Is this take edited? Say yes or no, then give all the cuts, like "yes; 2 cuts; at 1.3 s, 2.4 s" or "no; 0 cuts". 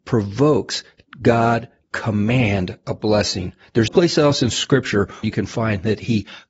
yes; 3 cuts; at 1.8 s, 3.9 s, 5.2 s